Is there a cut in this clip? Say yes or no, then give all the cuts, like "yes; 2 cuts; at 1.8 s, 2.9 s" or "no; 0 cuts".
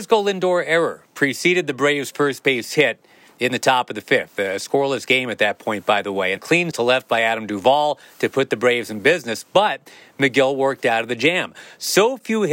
yes; 2 cuts; at 6.4 s, 6.7 s